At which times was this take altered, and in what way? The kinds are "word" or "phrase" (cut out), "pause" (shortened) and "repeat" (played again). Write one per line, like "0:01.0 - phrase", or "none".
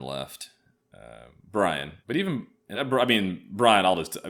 0:02.0 - pause
0:02.7 - word